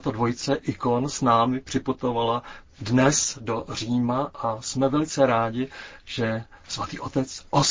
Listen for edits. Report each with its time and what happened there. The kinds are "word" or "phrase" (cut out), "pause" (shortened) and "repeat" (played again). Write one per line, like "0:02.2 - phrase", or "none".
0:02.7 - pause